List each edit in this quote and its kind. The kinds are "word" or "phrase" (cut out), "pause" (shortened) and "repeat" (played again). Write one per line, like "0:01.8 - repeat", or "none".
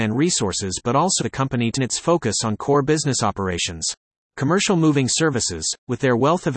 0:01.2 - word
0:01.8 - word
0:04.2 - pause